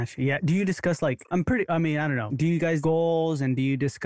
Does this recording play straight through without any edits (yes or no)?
no